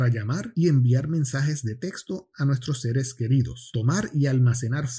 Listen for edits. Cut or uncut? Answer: uncut